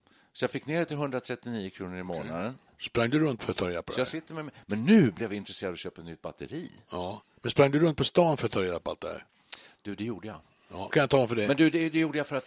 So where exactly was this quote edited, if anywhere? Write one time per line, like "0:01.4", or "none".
0:02.7
0:03.4
0:10.9